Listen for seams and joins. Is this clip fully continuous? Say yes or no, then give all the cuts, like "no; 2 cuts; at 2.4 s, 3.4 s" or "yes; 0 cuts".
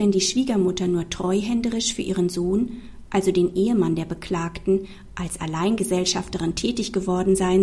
yes; 0 cuts